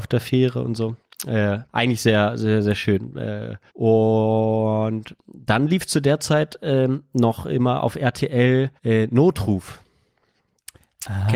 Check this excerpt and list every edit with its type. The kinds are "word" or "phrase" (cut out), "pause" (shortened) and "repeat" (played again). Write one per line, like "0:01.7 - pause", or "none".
0:01.7 - pause
0:03.7 - pause
0:08.8 - pause